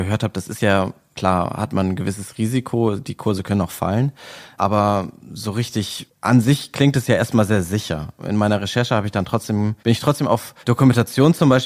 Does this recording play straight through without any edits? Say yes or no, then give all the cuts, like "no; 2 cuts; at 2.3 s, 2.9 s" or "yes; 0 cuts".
no; 2 cuts; at 9.8 s, 10.6 s